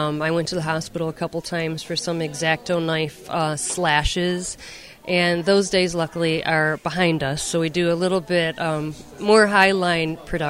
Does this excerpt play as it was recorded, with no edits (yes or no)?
yes